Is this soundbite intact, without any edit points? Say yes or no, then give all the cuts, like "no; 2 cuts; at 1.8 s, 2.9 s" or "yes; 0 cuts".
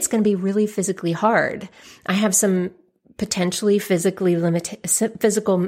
yes; 0 cuts